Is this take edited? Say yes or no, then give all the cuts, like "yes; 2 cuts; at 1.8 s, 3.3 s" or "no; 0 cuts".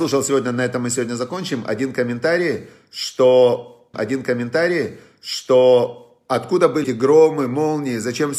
yes; 2 cuts; at 3.9 s, 6.8 s